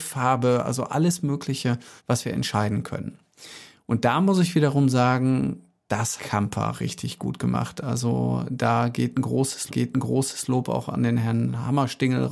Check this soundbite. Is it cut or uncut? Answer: cut